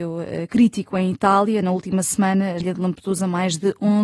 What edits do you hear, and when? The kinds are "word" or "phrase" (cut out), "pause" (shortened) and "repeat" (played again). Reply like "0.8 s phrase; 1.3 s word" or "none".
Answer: 2.6 s phrase